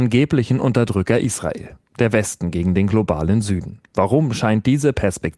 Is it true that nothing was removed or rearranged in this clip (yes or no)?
yes